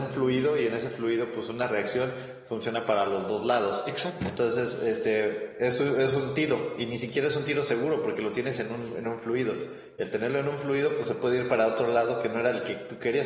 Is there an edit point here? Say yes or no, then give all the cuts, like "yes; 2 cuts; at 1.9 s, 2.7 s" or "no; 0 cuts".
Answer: no; 0 cuts